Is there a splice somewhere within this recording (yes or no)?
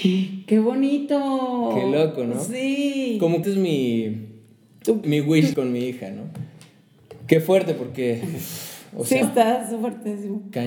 yes